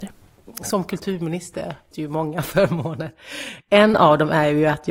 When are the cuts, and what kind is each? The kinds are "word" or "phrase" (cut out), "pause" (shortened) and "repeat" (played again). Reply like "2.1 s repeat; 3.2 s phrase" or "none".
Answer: 1.9 s word